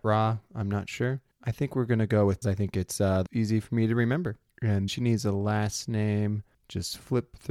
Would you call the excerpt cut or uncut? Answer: cut